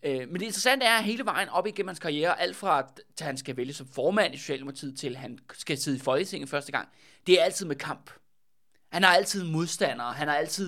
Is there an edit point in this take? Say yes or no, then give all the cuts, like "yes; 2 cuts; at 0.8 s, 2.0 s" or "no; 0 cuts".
no; 0 cuts